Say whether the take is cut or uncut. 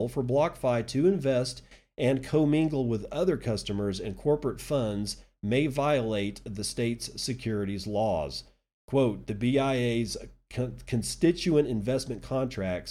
uncut